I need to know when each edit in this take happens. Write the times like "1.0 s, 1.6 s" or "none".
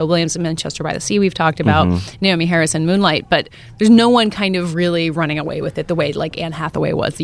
none